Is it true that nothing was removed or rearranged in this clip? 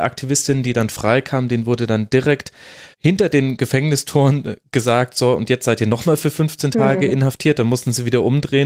no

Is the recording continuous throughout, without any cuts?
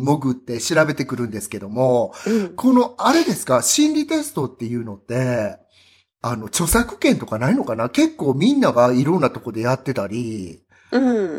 yes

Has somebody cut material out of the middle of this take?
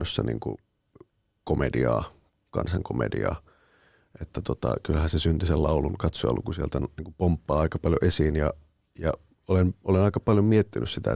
no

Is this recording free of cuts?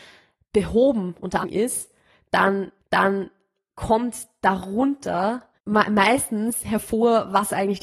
no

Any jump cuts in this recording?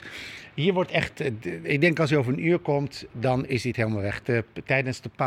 no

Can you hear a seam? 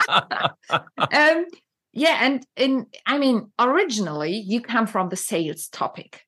no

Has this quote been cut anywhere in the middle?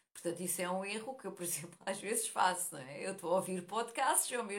no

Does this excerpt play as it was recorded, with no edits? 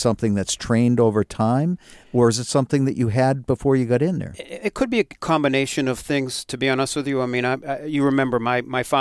yes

